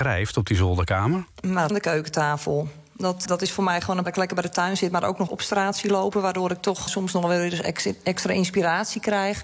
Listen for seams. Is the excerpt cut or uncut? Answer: cut